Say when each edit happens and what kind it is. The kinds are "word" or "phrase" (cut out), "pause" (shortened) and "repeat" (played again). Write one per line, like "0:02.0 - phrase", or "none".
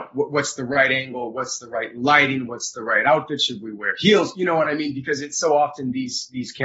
none